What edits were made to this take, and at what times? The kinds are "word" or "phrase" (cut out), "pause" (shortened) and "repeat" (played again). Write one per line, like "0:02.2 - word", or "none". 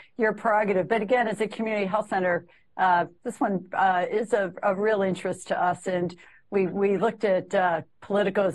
none